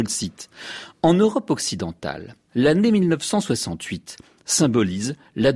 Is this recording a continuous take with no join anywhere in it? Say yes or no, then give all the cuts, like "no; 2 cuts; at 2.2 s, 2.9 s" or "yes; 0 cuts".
yes; 0 cuts